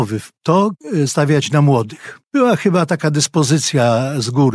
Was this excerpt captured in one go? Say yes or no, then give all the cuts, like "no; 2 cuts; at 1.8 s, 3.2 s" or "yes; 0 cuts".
no; 2 cuts; at 1.1 s, 2.3 s